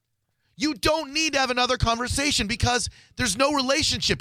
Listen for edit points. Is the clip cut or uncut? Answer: uncut